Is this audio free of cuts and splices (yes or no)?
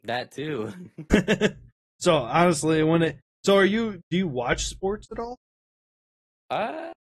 yes